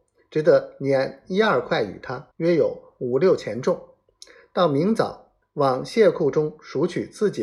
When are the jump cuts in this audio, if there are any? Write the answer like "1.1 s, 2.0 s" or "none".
2.3 s, 5.4 s